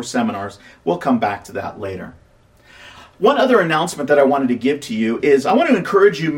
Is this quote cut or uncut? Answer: uncut